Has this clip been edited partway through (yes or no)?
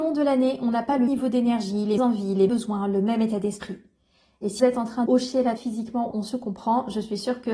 yes